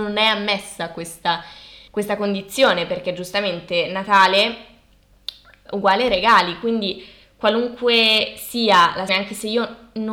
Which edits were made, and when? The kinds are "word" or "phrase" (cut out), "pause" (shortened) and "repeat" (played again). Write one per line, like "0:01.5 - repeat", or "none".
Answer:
0:01.9 - pause
0:05.7 - word
0:09.1 - word

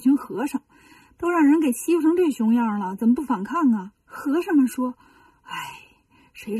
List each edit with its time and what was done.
0:04.0 - pause

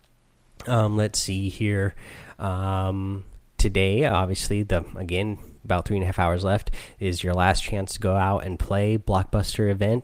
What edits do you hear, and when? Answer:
0:05.6 - pause

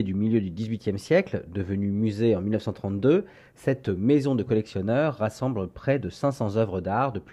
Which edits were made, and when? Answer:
none

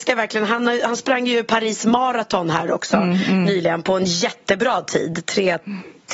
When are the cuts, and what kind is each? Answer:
none

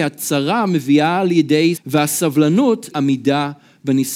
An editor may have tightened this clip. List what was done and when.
0:01.8 - word
0:02.9 - word

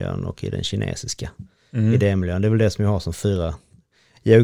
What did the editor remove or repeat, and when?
none

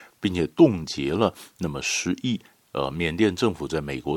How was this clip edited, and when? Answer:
none

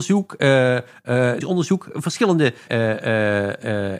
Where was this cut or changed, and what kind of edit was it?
0:01.4 - word
0:02.7 - word

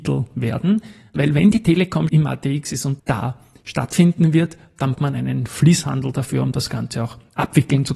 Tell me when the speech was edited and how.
0:02.1 - word
0:03.0 - phrase
0:05.0 - word

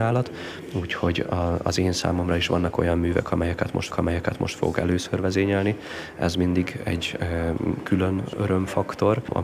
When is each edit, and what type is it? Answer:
0:03.9 - repeat

